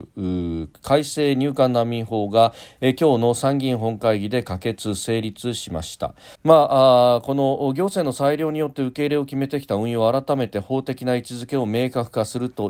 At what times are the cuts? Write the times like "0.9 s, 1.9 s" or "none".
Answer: 6.3 s